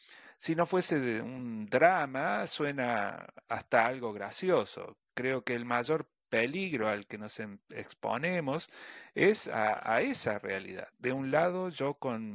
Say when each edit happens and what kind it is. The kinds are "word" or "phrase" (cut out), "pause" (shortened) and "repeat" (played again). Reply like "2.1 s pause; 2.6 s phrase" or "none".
10.9 s pause